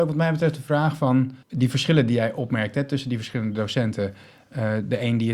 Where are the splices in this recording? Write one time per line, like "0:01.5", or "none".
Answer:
0:01.4